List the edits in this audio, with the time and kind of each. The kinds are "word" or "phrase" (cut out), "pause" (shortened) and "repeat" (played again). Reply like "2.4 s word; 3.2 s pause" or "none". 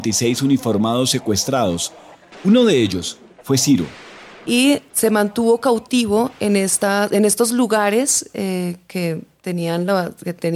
none

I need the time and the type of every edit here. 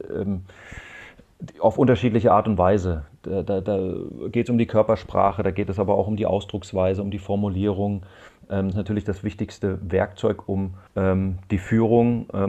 8.7 s phrase; 10.9 s pause

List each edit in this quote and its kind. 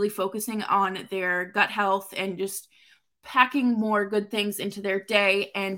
none

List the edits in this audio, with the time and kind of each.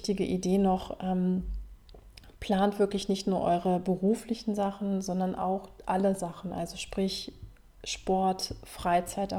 none

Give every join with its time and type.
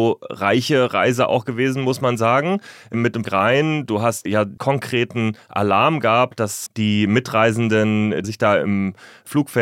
3.2 s word; 4.3 s word; 4.6 s phrase; 6.7 s word; 8.2 s word

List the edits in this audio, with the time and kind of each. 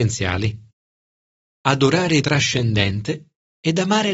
2.2 s word

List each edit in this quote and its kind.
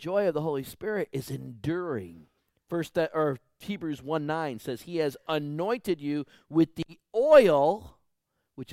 2.4 s pause

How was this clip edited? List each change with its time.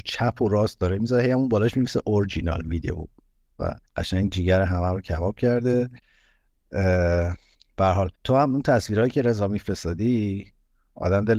3.9 s pause; 7.5 s pause; 8.1 s pause

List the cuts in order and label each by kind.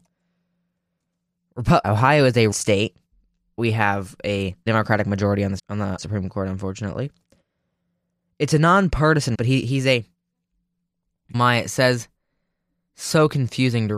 1.8 s word; 2.5 s word; 3.6 s word; 4.7 s word; 5.6 s word; 6.0 s word; 9.3 s word; 11.3 s word

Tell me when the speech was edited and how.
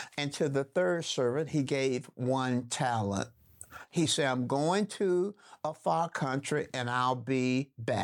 none

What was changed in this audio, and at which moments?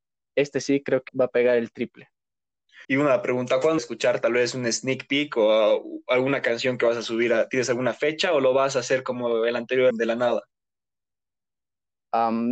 1.1 s word; 2.8 s pause; 3.8 s phrase; 9.9 s word

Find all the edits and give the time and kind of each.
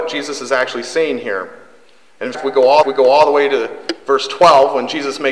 2.3 s word; 2.8 s repeat

